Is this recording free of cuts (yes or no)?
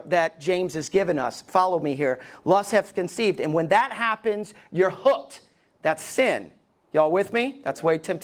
yes